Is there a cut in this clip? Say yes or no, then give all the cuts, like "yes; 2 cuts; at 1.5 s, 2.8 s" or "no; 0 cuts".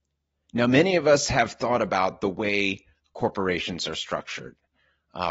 no; 0 cuts